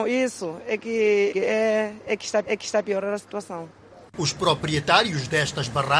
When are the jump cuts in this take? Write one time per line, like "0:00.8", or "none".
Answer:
0:01.3
0:02.4
0:04.1